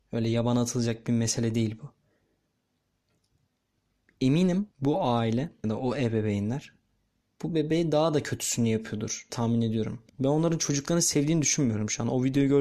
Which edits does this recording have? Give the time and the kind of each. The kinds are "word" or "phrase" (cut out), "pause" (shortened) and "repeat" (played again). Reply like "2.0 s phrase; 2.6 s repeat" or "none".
4.7 s pause; 5.6 s word; 9.3 s word; 10.1 s pause